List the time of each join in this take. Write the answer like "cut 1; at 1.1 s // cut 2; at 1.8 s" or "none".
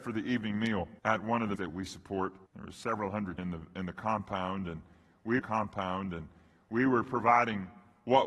cut 1; at 1.0 s // cut 2; at 1.6 s // cut 3; at 2.5 s // cut 4; at 3.4 s // cut 5; at 5.4 s